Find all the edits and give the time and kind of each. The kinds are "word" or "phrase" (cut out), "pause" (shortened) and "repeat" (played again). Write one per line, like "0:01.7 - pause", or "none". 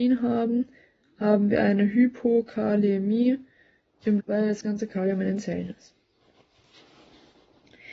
0:04.2 - word